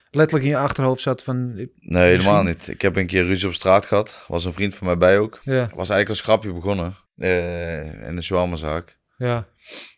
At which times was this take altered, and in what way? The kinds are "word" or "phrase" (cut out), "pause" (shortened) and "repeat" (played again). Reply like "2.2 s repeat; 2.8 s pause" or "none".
7.0 s pause